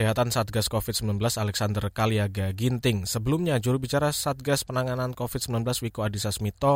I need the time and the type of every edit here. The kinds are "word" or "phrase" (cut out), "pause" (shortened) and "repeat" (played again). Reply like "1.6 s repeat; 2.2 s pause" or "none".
none